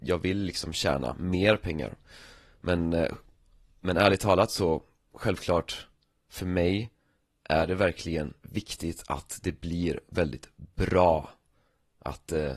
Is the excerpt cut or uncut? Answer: uncut